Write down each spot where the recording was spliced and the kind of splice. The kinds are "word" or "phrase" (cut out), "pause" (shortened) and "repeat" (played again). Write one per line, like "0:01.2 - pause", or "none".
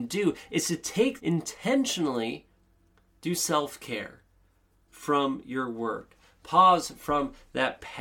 0:01.2 - phrase
0:03.4 - word
0:04.9 - word